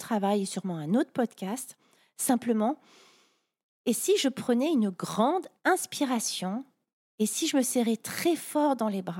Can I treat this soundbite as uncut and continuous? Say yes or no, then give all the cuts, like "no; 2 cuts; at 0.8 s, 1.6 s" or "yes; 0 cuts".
yes; 0 cuts